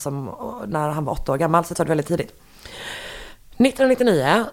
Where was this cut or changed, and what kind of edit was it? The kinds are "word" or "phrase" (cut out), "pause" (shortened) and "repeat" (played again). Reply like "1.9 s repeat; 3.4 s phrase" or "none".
1.7 s word